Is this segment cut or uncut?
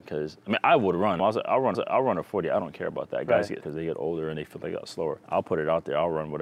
cut